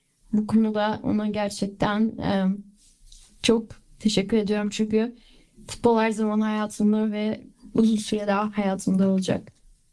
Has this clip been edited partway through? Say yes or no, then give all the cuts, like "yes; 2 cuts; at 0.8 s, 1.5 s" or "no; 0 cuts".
no; 0 cuts